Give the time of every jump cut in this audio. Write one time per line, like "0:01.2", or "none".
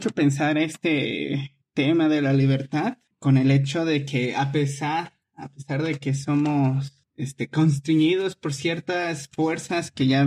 none